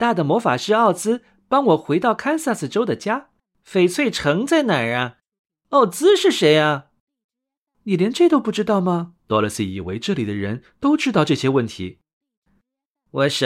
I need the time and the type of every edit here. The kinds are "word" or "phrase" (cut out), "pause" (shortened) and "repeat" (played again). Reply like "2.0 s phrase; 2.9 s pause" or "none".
9.2 s pause

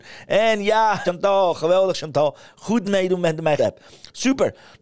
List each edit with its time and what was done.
1.0 s phrase; 2.8 s phrase; 3.6 s word

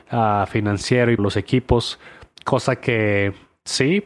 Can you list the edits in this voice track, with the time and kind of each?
1.2 s word

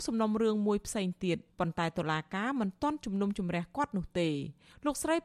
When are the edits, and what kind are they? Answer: 1.5 s pause

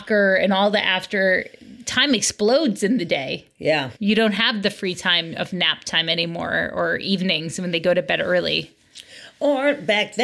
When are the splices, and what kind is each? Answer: 4.0 s pause

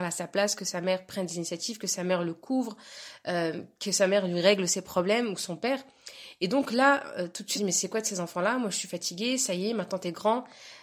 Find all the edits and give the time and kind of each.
7.5 s word

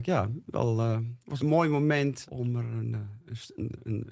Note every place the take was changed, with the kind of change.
1.4 s word; 2.2 s word

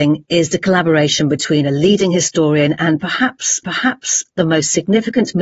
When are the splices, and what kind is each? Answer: 3.6 s repeat

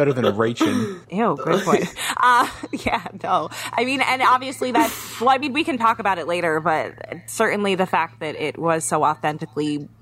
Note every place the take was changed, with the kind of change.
1.0 s pause

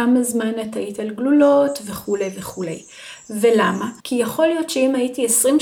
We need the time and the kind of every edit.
4.0 s pause

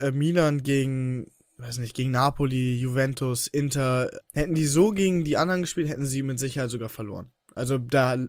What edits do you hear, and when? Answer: 4.2 s word

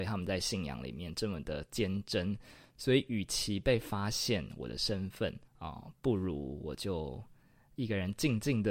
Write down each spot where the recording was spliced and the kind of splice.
5.5 s pause

